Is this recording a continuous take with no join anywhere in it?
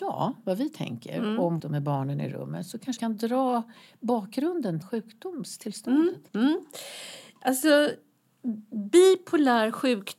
no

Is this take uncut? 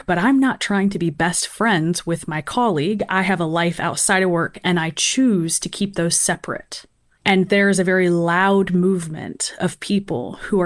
yes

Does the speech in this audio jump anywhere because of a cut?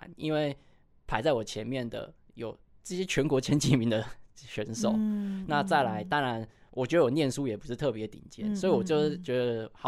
no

